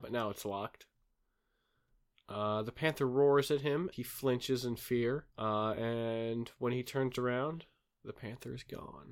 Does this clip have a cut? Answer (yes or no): yes